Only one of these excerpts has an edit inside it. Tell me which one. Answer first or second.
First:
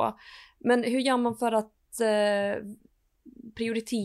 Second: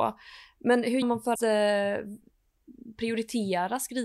second